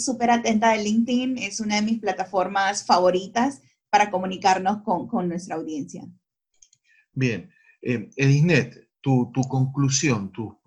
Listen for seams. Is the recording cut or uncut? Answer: uncut